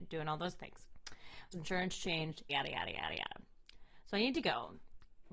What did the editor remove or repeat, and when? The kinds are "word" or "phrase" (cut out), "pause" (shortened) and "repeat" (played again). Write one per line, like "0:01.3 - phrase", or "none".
0:01.5 - phrase
0:02.5 - word